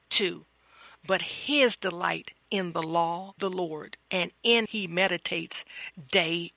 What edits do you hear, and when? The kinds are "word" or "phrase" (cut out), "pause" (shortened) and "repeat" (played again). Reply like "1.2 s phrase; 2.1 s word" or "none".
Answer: 2.4 s word; 3.4 s word; 4.0 s pause; 4.7 s phrase